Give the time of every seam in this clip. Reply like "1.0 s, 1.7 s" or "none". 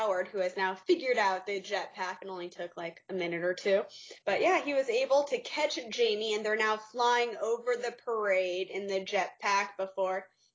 4.2 s